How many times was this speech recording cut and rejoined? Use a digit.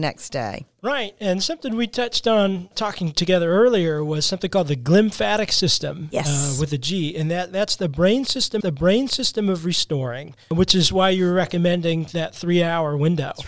2